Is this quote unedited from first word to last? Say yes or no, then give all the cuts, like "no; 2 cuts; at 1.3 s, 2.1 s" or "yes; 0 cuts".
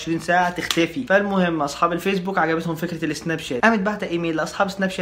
yes; 0 cuts